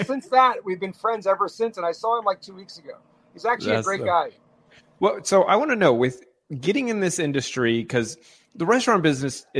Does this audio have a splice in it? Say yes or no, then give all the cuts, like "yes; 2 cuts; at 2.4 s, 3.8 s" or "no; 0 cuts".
no; 0 cuts